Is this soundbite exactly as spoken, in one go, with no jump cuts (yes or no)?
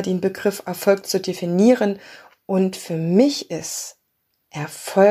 yes